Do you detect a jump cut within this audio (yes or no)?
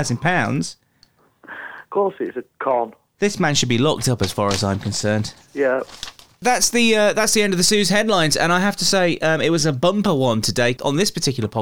no